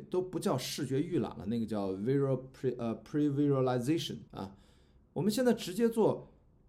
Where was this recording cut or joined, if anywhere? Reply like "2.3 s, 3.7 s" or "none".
4.3 s